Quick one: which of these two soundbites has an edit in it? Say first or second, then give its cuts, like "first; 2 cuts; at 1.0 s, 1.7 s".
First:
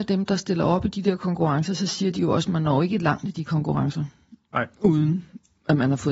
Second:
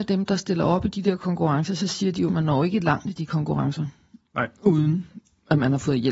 second; 1 cut; at 2.3 s